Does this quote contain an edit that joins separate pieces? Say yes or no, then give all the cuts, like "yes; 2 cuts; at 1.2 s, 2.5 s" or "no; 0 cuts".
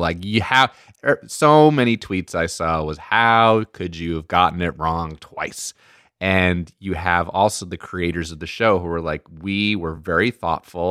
no; 0 cuts